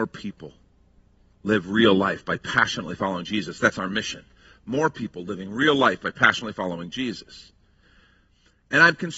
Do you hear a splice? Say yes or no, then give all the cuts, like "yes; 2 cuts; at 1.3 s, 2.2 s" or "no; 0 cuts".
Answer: no; 0 cuts